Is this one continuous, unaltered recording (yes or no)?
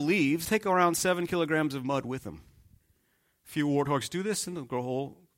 yes